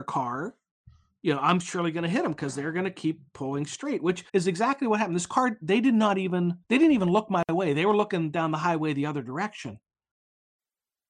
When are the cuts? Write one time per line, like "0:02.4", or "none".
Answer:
0:04.3
0:06.6